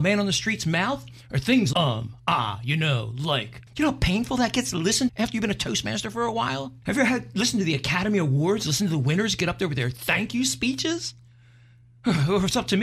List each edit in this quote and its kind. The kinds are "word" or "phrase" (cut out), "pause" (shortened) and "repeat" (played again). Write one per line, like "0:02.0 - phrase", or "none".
0:01.7 - word
0:03.7 - pause
0:05.1 - word
0:06.8 - pause